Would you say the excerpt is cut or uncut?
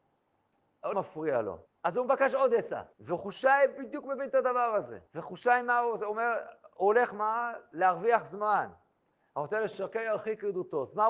cut